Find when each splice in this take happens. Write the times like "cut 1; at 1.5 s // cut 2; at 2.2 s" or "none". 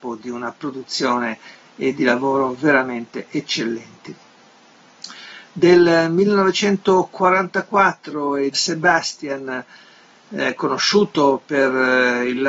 cut 1; at 2.0 s // cut 2; at 8.5 s